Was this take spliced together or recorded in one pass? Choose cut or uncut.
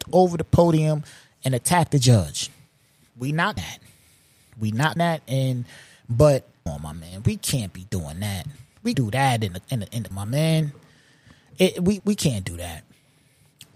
cut